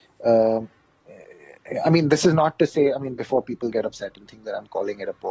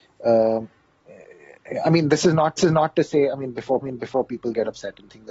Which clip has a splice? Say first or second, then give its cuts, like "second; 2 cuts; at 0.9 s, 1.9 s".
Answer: second; 2 cuts; at 2.6 s, 3.8 s